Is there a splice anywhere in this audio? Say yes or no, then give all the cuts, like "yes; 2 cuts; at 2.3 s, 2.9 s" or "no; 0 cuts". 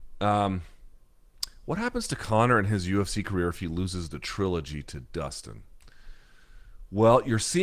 no; 0 cuts